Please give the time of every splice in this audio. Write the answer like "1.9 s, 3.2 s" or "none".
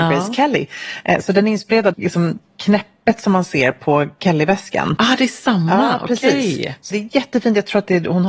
1.9 s, 6.9 s